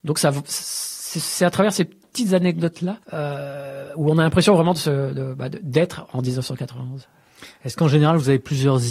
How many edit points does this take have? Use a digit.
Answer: 1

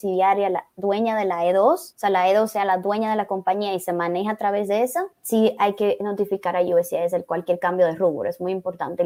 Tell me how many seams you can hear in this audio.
2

